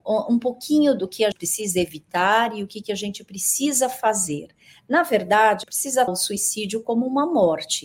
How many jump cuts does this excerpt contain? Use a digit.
3